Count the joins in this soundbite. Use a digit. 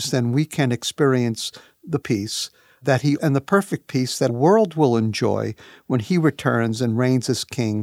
3